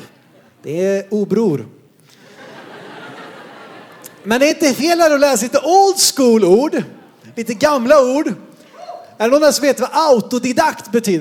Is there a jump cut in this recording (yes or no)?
no